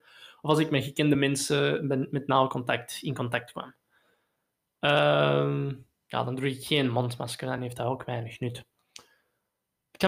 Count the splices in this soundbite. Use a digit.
0